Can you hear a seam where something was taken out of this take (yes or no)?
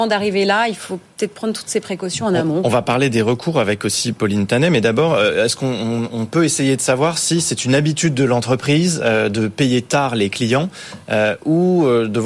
no